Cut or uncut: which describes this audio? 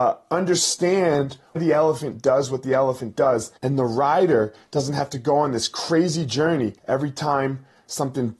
cut